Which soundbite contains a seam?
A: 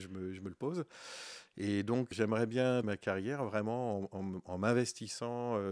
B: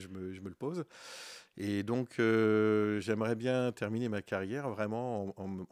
A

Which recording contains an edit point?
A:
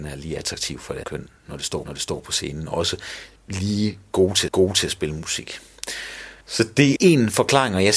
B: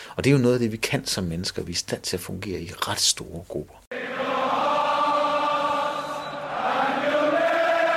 A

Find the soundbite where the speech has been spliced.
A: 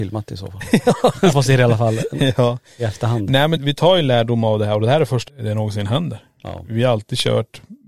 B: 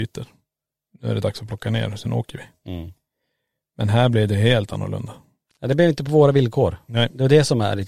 A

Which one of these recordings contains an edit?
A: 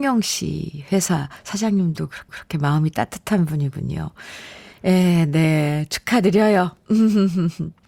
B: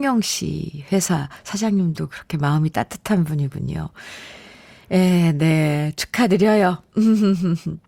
A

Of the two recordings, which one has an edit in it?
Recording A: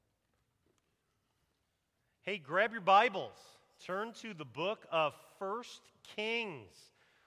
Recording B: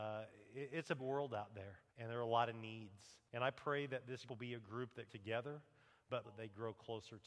B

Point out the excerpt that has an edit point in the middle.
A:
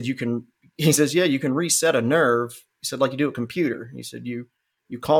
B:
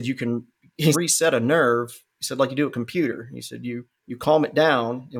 B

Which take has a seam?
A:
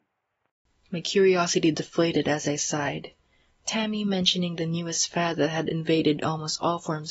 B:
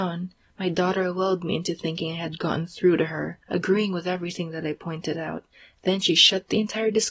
B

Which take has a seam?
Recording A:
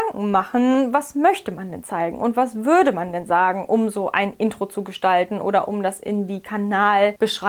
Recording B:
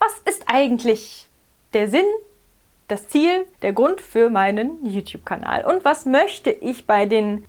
B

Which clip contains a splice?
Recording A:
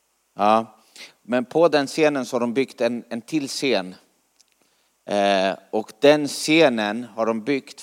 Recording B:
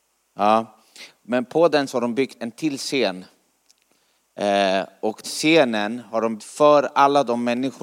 B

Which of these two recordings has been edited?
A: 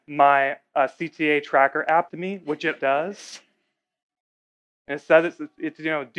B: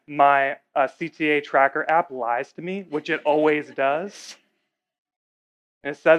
A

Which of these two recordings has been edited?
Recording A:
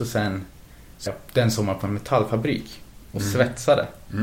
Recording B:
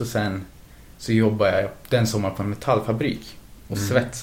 A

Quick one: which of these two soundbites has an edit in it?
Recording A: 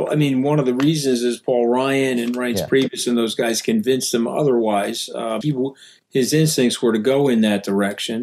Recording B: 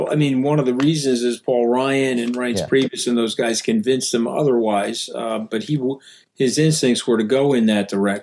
A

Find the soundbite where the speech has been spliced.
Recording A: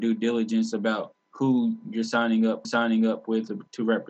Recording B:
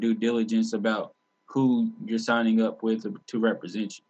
A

